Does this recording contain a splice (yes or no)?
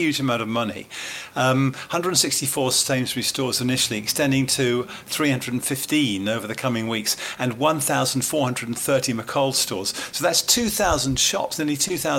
no